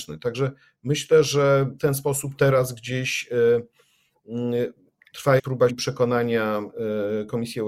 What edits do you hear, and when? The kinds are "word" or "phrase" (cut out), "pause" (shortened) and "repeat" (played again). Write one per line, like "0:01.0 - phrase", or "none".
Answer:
0:01.8 - word
0:05.4 - word
0:05.7 - word